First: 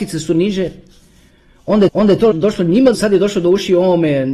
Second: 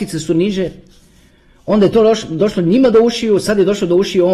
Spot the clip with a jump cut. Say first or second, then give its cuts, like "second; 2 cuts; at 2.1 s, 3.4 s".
first; 3 cuts; at 1.9 s, 2.3 s, 2.9 s